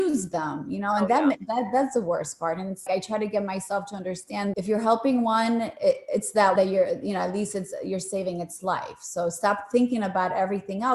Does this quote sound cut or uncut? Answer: cut